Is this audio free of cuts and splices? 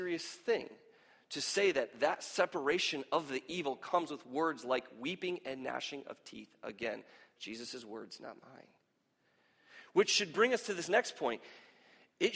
yes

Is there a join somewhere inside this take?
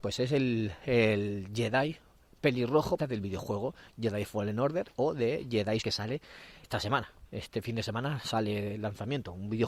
yes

